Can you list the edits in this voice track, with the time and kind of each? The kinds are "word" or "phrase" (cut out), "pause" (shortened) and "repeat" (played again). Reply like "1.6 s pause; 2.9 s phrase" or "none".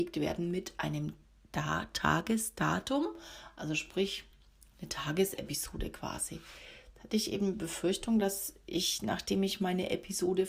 none